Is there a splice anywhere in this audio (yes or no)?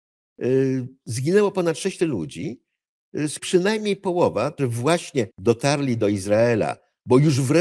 yes